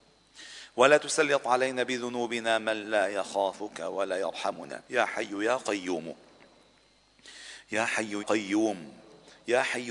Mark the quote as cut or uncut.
cut